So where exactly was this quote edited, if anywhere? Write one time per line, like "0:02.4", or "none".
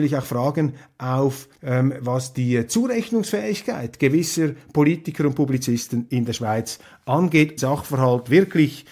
0:01.6
0:07.6